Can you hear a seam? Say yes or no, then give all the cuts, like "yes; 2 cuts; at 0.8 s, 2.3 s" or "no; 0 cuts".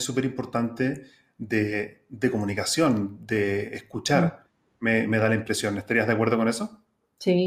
no; 0 cuts